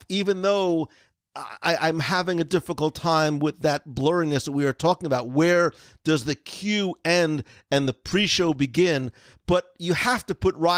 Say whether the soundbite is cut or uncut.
uncut